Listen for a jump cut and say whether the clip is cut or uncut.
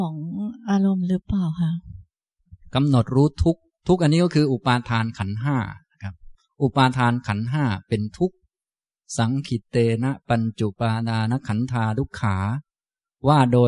uncut